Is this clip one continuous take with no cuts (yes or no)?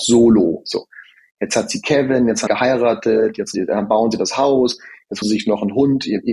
no